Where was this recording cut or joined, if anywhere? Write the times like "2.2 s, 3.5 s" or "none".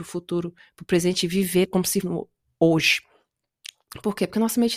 1.7 s, 2.0 s